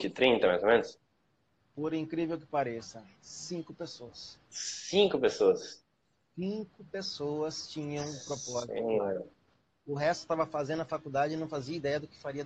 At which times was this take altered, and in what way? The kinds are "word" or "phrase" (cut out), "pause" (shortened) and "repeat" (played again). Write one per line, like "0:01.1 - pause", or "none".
none